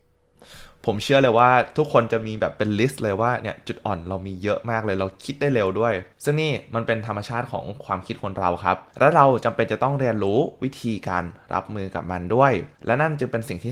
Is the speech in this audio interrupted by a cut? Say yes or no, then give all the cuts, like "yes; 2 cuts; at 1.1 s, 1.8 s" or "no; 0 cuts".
yes; 3 cuts; at 6.1 s, 8.9 s, 12.7 s